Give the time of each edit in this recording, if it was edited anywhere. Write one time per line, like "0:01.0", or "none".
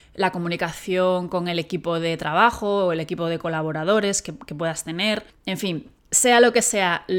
0:05.3
0:06.0